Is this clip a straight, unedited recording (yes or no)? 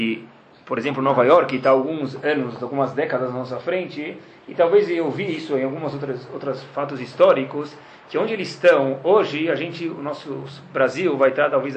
yes